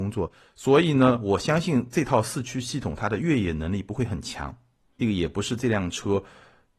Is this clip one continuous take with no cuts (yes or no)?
yes